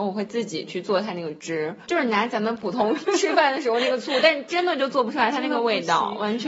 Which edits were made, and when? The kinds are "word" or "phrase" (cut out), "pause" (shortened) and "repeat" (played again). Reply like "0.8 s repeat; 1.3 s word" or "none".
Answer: 1.8 s word